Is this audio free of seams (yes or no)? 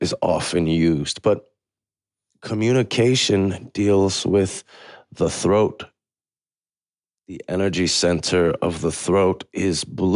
yes